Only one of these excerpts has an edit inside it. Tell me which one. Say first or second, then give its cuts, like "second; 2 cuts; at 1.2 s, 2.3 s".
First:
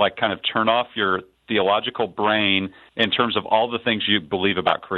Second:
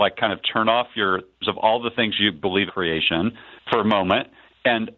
second; 2 cuts; at 1.4 s, 2.7 s